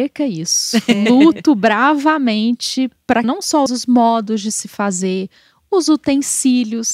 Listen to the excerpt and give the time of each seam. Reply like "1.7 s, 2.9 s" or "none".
3.2 s, 3.7 s